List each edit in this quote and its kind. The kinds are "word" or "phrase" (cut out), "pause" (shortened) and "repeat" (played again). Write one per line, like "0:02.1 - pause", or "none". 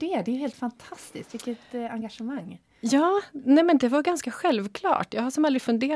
none

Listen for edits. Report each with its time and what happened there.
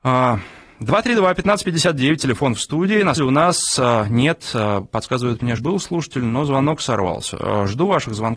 0:03.2 - word
0:05.6 - word

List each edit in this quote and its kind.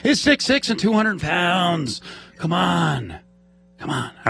0:01.2 - word

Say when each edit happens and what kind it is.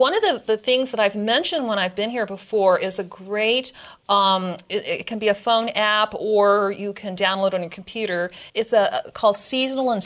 0:08.5 - pause

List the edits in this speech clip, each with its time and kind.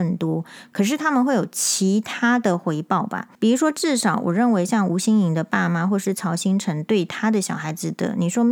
0:03.3 - pause

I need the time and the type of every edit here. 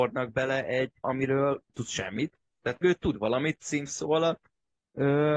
0:01.0 - word
0:01.7 - word
0:02.8 - word

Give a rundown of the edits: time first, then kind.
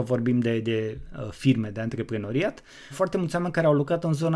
0:02.9 - word

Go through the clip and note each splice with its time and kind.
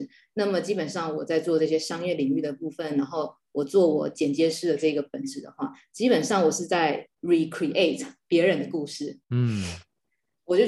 0:07.1 - pause
0:09.2 - pause

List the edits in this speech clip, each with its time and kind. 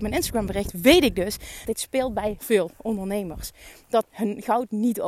0:01.6 - word
0:02.4 - word
0:04.0 - word

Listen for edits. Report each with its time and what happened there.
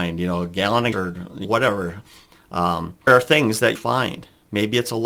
0:00.9 - word
0:01.4 - word
0:03.1 - word
0:03.8 - word

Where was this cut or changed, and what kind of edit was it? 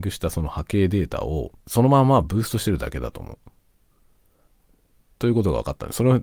0:01.6 - pause

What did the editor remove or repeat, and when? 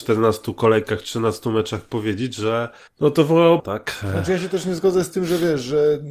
0:02.9 - pause
0:03.6 - phrase

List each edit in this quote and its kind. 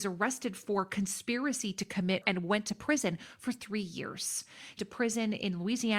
0:02.2 - word
0:04.8 - word

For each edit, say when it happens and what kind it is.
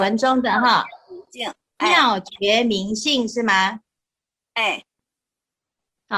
none

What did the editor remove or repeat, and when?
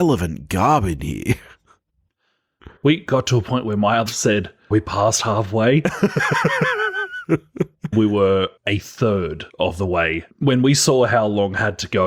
0:01.0 - word
0:02.8 - pause
0:04.1 - word
0:04.7 - phrase
0:07.9 - word
0:08.6 - pause
0:09.5 - pause
0:10.3 - pause

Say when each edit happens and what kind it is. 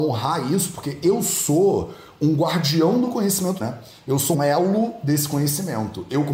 0:03.6 - phrase
0:04.3 - word

